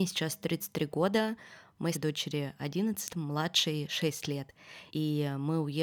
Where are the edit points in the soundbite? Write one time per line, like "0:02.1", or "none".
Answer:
0:01.9
0:03.1
0:04.9